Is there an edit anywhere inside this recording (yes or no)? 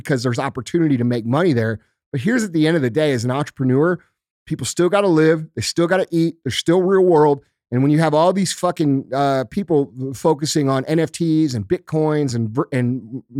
no